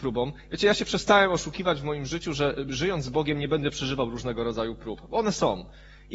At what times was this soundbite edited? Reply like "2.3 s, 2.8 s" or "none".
none